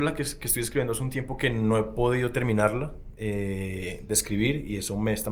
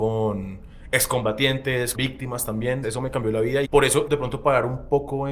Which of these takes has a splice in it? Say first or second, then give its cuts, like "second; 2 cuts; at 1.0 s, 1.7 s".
second; 4 cuts; at 1.9 s, 2.8 s, 3.6 s, 4.1 s